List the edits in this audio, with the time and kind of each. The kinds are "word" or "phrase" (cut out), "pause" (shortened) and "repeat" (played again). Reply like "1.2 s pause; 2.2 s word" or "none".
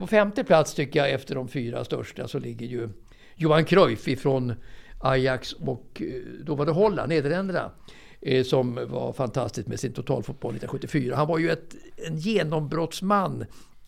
none